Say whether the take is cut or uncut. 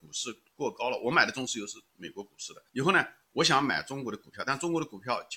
cut